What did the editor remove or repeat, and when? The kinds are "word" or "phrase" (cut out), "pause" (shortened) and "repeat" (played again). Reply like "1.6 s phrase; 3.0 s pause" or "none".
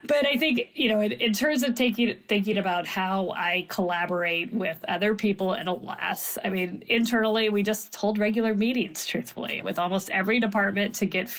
none